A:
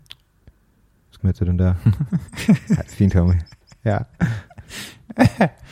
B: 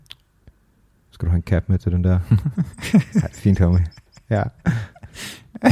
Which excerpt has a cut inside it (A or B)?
A